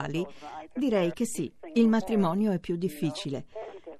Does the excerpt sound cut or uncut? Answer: uncut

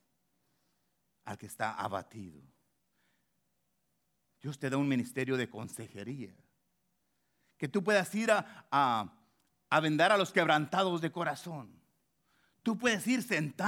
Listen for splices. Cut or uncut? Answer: uncut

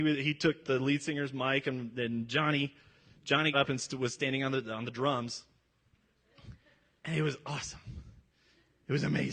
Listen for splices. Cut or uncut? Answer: cut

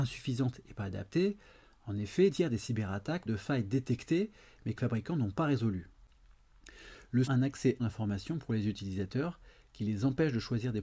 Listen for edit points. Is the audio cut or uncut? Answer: cut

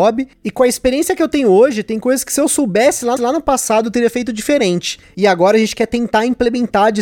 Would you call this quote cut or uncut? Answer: cut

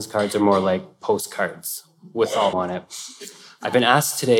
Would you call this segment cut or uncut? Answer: cut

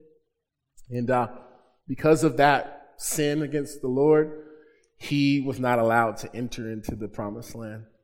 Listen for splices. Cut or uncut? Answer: uncut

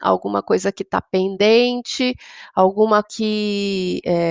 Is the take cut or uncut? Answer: cut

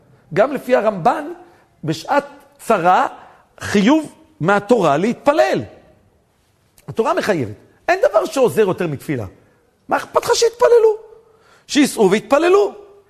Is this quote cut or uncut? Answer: uncut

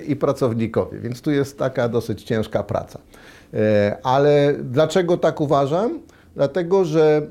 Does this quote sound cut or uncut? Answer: uncut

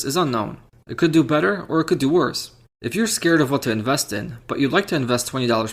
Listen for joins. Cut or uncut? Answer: uncut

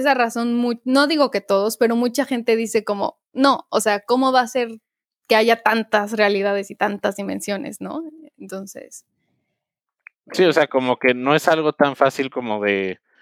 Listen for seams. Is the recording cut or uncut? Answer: uncut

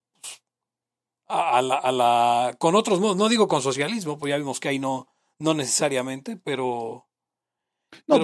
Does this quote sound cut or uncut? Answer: uncut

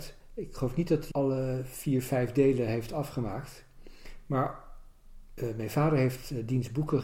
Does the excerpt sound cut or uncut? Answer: cut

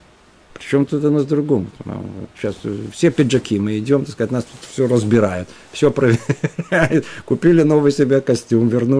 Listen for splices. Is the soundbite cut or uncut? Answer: uncut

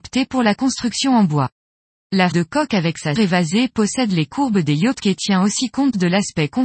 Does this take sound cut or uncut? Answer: cut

